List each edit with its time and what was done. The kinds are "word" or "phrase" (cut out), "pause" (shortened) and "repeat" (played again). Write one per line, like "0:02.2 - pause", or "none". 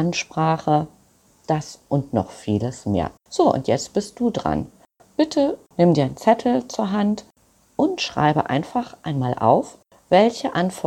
0:03.2 - pause